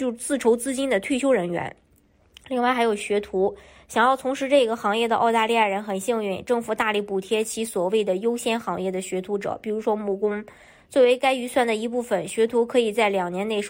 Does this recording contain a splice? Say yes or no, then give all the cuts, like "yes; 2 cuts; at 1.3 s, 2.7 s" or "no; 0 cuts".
no; 0 cuts